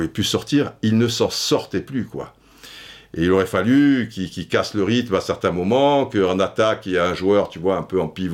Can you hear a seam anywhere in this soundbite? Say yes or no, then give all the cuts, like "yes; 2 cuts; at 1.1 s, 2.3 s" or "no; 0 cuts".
no; 0 cuts